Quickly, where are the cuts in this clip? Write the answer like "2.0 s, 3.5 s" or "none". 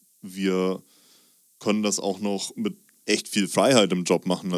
none